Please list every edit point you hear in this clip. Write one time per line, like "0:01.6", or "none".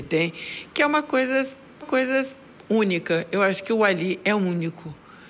0:01.8

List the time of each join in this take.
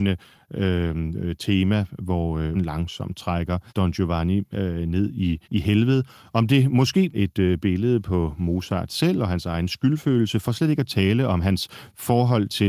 0:02.5
0:03.7
0:05.4
0:07.1

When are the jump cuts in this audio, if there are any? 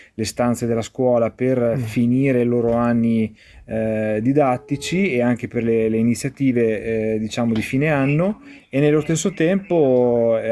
none

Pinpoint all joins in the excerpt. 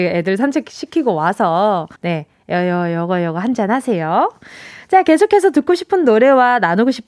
0:02.0

